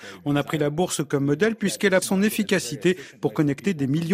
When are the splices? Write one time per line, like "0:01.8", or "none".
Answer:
0:02.0